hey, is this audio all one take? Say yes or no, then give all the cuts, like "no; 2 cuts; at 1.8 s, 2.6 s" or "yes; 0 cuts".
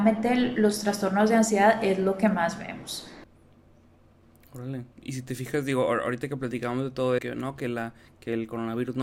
no; 1 cut; at 7.2 s